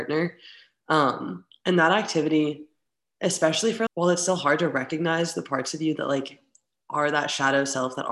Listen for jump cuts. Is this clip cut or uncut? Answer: cut